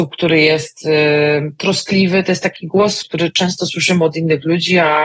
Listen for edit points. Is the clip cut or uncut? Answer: cut